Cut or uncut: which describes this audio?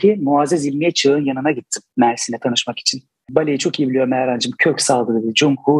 uncut